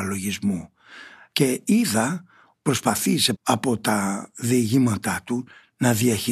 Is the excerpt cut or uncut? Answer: cut